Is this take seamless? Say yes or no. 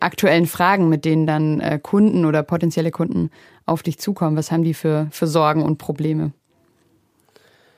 yes